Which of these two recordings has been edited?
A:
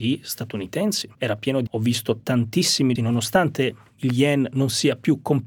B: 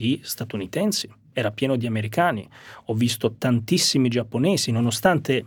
A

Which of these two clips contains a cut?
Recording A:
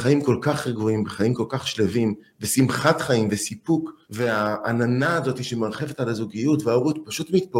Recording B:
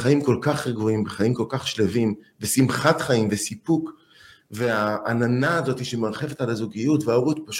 A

